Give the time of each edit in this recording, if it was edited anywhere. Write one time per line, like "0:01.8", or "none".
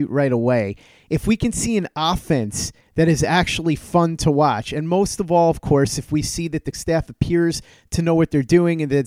0:06.7